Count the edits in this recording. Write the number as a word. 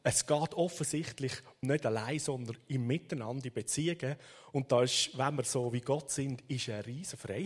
one